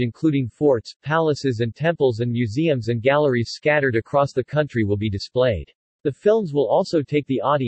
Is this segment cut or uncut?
cut